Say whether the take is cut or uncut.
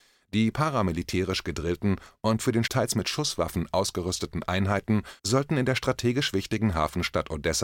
cut